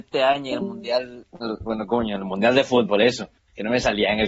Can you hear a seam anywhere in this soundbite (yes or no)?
yes